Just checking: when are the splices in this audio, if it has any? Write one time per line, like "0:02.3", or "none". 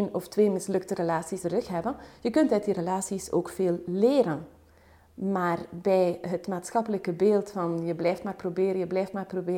0:01.4